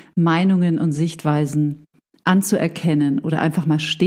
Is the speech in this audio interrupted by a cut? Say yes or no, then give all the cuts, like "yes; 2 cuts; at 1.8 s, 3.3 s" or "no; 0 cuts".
no; 0 cuts